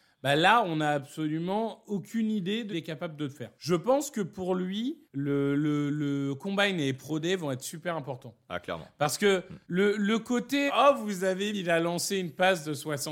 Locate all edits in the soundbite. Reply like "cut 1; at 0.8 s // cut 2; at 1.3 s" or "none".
cut 1; at 2.7 s // cut 2; at 3.6 s // cut 3; at 5.1 s // cut 4; at 9.6 s // cut 5; at 10.7 s // cut 6; at 11.5 s

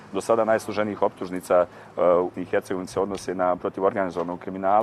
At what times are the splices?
cut 1; at 2.3 s // cut 2; at 2.9 s // cut 3; at 3.6 s

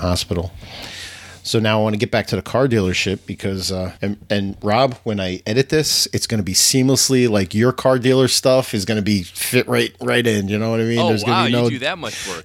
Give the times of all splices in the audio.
cut 1; at 4.0 s

